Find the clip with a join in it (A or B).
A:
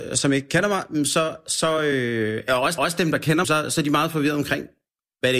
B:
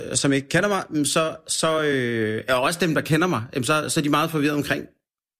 A